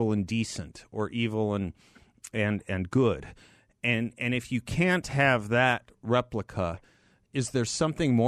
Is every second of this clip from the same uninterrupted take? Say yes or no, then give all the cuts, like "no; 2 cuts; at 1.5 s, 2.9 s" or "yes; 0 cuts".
yes; 0 cuts